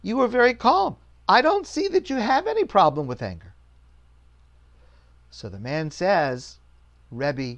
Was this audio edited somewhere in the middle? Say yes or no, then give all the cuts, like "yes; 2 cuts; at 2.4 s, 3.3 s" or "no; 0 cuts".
no; 0 cuts